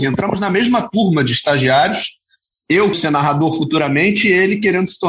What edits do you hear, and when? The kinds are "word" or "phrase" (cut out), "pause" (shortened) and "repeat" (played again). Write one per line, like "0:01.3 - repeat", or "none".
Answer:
0:02.9 - word